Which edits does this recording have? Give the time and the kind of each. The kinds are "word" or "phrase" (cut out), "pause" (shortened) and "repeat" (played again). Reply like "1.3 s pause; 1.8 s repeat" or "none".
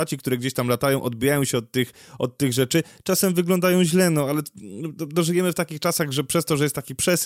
none